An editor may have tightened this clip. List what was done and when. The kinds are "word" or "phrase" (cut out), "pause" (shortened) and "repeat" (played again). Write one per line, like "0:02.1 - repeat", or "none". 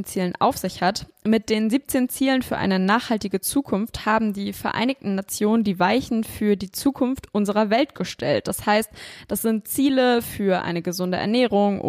none